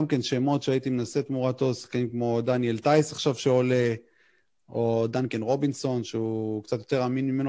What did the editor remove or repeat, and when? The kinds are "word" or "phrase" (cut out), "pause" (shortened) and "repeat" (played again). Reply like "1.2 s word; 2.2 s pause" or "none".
none